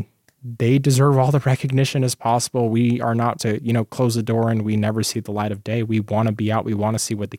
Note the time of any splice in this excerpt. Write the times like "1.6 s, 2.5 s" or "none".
3.4 s